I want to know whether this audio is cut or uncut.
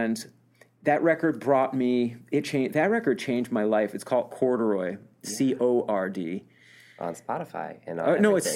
uncut